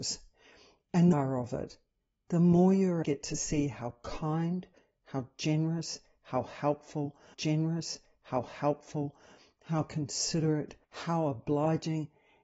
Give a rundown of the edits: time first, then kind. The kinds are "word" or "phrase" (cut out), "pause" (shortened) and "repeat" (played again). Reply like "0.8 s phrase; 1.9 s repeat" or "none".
1.1 s phrase; 3.0 s word; 7.3 s repeat; 10.8 s pause